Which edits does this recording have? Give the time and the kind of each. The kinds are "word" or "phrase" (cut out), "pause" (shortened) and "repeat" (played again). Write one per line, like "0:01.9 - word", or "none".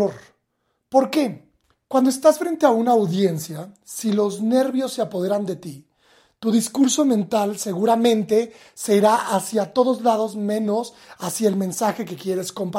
none